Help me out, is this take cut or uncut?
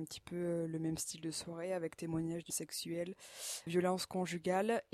cut